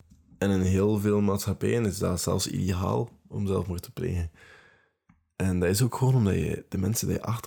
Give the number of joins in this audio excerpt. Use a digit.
0